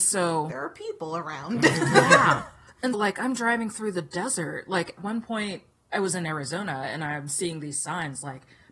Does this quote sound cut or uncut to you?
cut